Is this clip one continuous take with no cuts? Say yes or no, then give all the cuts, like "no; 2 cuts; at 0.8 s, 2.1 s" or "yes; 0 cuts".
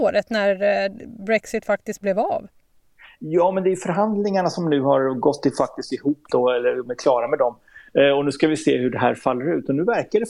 yes; 0 cuts